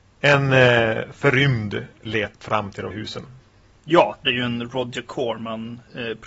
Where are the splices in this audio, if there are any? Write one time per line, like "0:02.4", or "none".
0:02.0
0:02.3
0:02.9
0:04.3